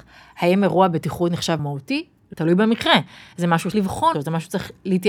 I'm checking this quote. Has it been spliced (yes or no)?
yes